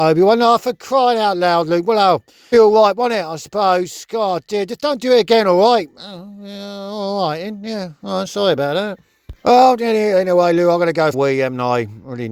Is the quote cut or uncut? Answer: cut